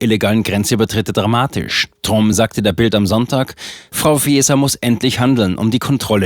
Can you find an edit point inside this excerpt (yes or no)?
no